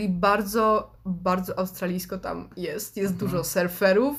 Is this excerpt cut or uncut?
uncut